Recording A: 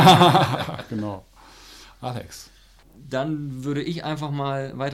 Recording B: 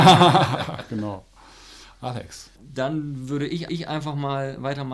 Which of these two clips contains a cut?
B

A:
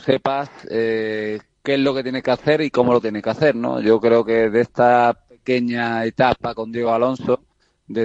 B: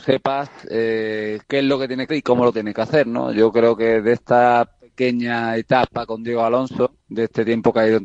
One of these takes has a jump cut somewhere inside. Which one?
B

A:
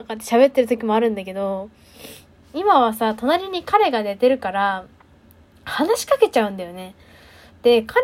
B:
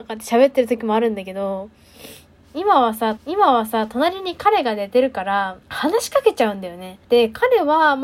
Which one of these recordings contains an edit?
B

